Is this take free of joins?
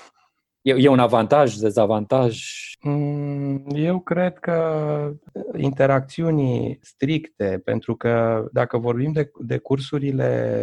no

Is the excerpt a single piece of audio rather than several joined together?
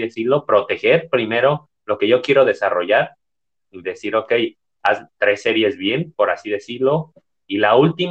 yes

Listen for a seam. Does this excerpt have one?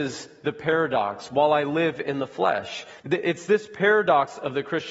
yes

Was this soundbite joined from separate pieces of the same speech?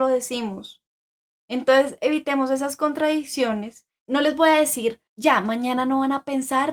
yes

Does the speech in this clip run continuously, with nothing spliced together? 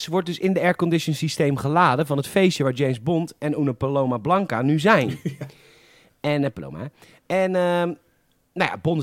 yes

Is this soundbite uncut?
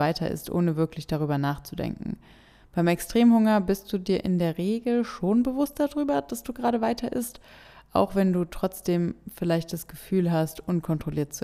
yes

